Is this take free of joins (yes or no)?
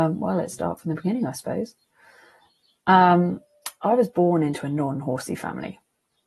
yes